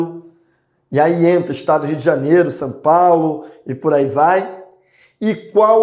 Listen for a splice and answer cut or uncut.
uncut